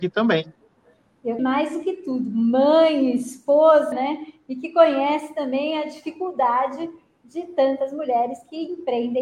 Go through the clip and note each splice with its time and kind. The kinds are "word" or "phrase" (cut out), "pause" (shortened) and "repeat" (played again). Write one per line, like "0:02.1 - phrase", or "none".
0:01.4 - phrase
0:03.9 - word